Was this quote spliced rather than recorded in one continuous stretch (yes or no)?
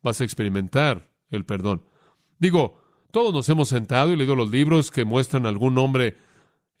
no